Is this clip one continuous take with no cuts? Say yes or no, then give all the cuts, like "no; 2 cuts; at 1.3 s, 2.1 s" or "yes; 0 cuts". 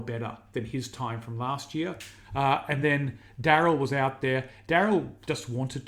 yes; 0 cuts